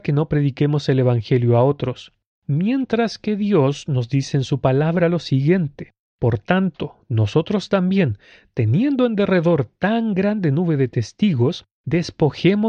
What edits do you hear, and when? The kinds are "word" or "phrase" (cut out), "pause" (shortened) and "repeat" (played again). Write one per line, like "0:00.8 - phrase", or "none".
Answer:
none

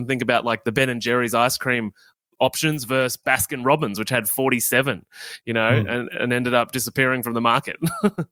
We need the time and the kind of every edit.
none

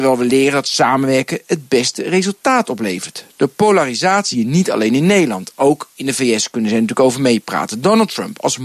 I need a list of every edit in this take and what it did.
0:04.3 - word

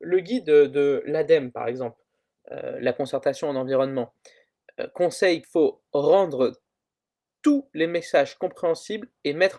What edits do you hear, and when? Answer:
0:05.4 - word

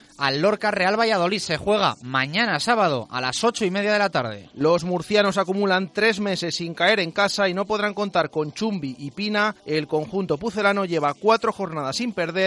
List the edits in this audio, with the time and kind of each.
0:09.6 - pause

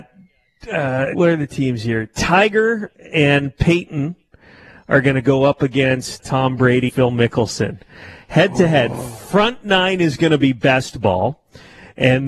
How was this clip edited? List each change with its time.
0:01.1 - word
0:06.2 - word
0:06.9 - word

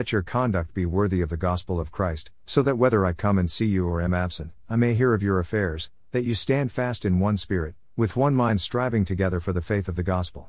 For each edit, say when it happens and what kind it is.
none

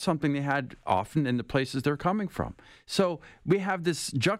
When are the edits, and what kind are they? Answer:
none

